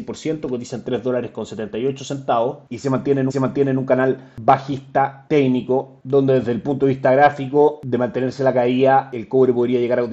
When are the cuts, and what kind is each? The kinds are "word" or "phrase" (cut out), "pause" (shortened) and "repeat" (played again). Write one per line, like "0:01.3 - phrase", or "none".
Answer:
0:03.3 - repeat